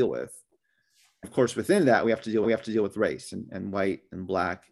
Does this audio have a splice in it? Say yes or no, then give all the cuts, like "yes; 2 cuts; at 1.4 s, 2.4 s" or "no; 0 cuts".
yes; 2 cuts; at 1.2 s, 2.4 s